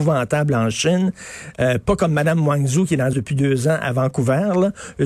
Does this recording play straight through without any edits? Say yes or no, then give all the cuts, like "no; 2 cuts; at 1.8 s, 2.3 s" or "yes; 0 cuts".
no; 1 cut; at 3.1 s